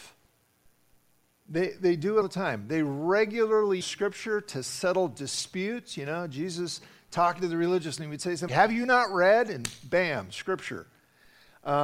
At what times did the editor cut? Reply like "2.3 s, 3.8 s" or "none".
2.2 s, 3.8 s, 8.0 s, 8.5 s